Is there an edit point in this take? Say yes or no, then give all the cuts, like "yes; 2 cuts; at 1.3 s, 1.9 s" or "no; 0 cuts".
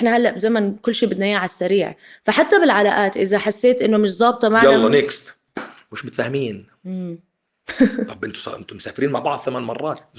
no; 0 cuts